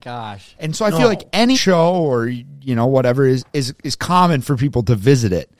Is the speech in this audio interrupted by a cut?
yes; 1 cut; at 1.5 s

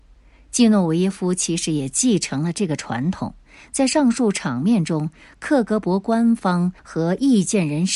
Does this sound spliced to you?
yes; 1 cut; at 6.8 s

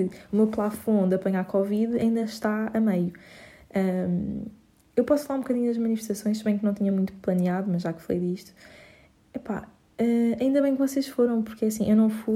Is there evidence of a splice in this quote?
no; 0 cuts

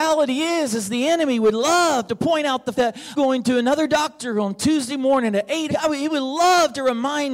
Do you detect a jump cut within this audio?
yes; 3 cuts; at 2.7 s, 3.1 s, 5.7 s

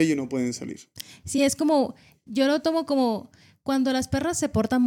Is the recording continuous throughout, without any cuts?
yes; 0 cuts

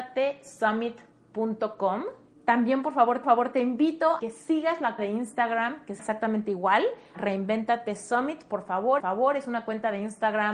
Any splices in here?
yes; 7 cuts; at 2.3 s, 3.2 s, 4.2 s, 5.0 s, 6.0 s, 7.1 s, 9.0 s

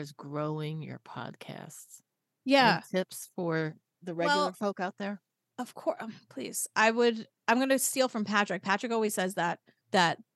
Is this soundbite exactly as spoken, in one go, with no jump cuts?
yes; 0 cuts

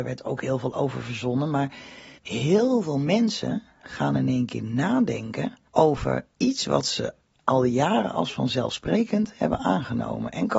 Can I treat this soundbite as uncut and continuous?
no; 2 cuts; at 2.2 s, 5.7 s

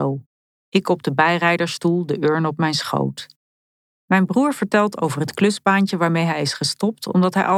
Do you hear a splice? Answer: no; 0 cuts

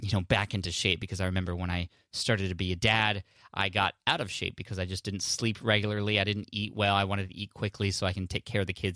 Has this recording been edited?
no; 0 cuts

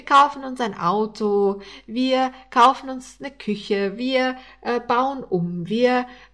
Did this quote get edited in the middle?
no; 0 cuts

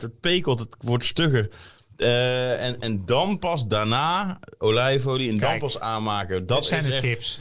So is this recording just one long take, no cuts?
yes; 0 cuts

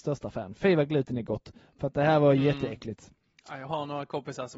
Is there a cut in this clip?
no; 0 cuts

